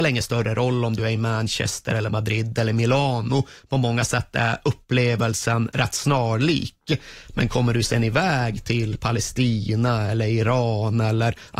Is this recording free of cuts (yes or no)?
yes